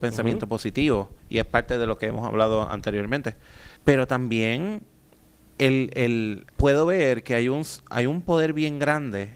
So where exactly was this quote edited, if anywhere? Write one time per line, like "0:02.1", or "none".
0:03.8
0:05.1
0:06.5